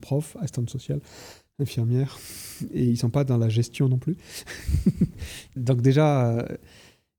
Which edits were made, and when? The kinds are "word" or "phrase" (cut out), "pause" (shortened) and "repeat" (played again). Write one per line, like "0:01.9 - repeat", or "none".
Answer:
0:05.6 - word